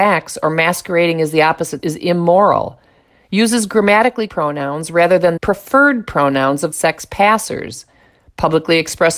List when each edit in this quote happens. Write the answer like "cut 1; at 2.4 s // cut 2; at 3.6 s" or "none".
cut 1; at 1.8 s // cut 2; at 4.3 s // cut 3; at 5.4 s // cut 4; at 6.7 s